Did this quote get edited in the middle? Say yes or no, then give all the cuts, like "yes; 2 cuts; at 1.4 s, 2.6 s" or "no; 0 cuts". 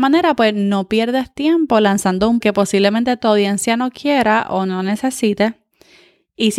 yes; 1 cut; at 2.4 s